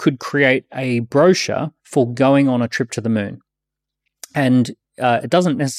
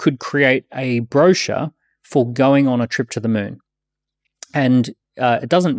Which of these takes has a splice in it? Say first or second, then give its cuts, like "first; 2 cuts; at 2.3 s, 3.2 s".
first; 1 cut; at 1.8 s